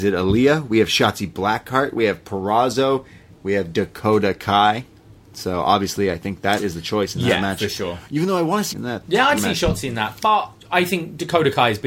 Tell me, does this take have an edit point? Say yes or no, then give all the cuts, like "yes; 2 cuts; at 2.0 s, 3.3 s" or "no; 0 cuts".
yes; 2 cuts; at 8.7 s, 9.4 s